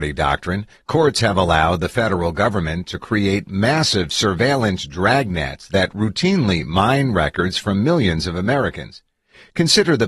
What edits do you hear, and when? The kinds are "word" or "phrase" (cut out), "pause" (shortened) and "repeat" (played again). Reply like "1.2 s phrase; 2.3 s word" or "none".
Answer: none